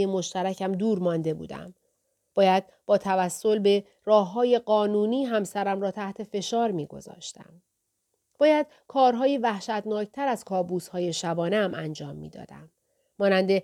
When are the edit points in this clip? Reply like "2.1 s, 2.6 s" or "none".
none

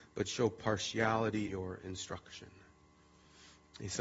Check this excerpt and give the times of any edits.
1.5 s

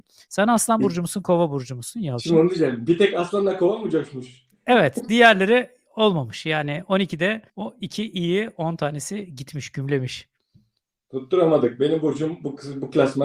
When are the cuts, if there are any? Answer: 7.5 s

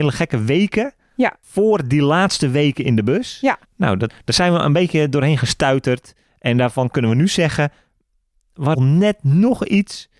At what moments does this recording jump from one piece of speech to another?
4.1 s, 8.7 s

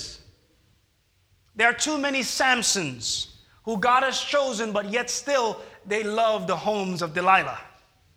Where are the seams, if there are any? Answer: none

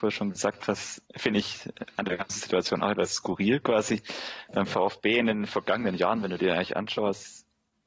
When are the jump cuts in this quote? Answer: 1.1 s

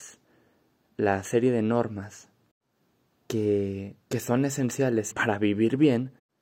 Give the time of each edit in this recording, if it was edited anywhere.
4.0 s, 5.1 s

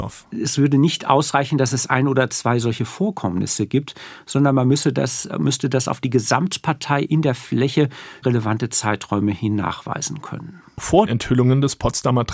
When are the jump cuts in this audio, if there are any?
8.2 s, 11.1 s

